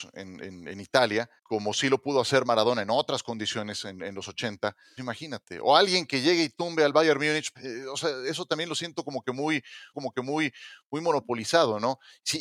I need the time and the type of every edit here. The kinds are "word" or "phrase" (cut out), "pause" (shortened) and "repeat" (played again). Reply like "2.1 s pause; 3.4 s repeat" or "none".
1.4 s pause; 5.0 s word; 7.5 s word; 9.9 s repeat